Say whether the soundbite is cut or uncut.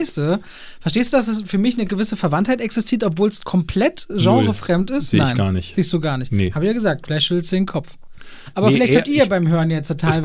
uncut